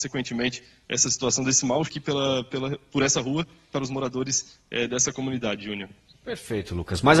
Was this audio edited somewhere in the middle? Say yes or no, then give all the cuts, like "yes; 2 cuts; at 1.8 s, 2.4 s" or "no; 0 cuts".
yes; 2 cuts; at 1.8 s, 3.7 s